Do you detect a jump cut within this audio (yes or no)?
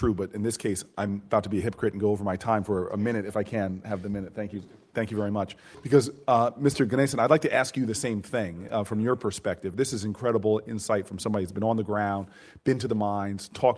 no